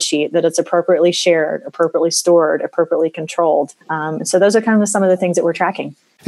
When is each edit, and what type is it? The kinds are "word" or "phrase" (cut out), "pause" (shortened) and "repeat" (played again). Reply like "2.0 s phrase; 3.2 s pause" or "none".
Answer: 3.8 s pause